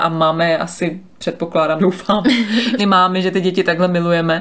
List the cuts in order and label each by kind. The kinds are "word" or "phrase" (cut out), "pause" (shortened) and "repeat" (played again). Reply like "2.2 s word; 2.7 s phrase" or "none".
1.8 s word; 2.8 s word